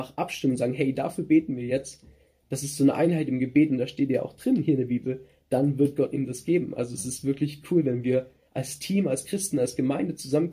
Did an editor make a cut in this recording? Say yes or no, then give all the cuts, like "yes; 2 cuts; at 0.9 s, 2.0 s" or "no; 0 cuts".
no; 0 cuts